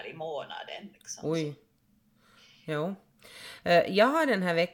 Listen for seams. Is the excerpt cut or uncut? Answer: uncut